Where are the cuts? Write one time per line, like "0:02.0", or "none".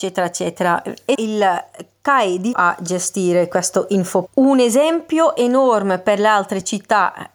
0:01.1
0:02.5
0:04.3